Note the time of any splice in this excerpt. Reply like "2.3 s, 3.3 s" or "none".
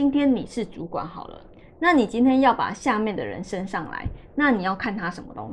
none